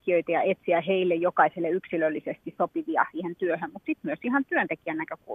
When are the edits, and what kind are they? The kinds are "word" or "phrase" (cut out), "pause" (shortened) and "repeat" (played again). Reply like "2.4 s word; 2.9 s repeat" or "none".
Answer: 3.1 s word